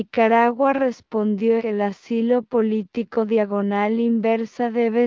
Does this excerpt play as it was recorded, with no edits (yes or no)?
no